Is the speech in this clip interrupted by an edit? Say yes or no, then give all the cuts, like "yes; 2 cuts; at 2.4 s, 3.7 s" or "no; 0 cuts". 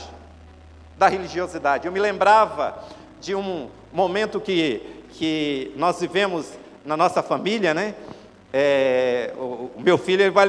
no; 0 cuts